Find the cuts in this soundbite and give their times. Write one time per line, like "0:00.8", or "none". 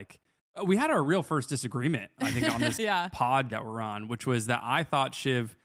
0:02.8
0:03.5